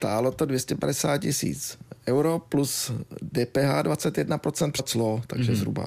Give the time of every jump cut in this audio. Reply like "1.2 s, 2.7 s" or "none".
4.8 s